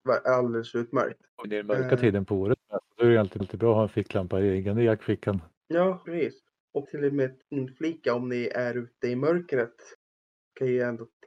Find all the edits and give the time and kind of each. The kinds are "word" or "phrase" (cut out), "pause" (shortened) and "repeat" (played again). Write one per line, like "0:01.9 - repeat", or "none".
0:01.4 - word
0:03.4 - repeat
0:06.0 - word
0:06.8 - phrase
0:07.4 - pause